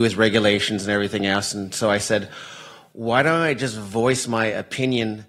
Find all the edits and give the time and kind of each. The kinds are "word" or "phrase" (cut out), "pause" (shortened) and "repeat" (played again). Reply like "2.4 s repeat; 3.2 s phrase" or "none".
none